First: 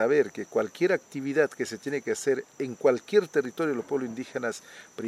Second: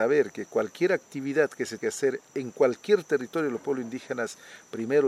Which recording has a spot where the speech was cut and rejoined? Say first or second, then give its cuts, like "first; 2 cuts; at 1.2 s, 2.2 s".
second; 1 cut; at 1.8 s